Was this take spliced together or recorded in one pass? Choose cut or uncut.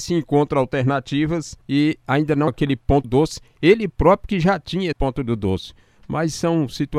cut